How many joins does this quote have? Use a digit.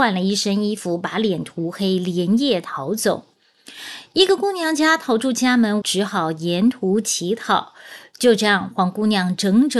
1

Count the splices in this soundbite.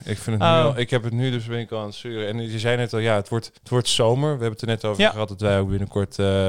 1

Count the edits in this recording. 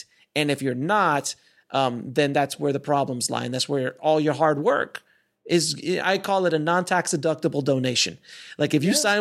0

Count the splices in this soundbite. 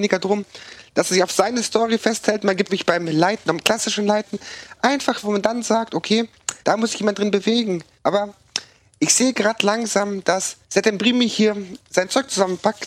5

